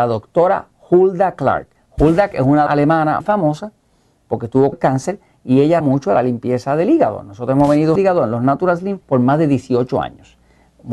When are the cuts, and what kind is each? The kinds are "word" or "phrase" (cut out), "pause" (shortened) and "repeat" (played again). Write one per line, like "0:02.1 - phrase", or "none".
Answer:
0:02.3 - word
0:02.7 - word
0:03.2 - word
0:04.7 - word
0:05.8 - word
0:08.0 - phrase
0:09.0 - pause